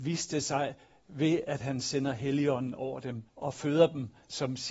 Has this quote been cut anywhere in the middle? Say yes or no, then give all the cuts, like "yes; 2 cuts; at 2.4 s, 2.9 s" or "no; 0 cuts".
yes; 1 cut; at 3.3 s